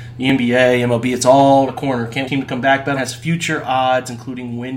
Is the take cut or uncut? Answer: cut